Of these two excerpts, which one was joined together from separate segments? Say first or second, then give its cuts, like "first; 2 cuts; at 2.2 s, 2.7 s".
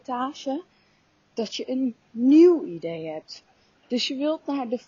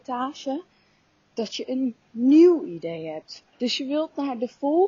second; 1 cut; at 3.5 s